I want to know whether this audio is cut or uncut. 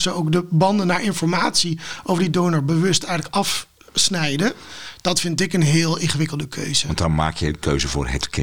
uncut